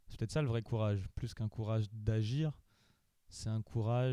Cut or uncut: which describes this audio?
uncut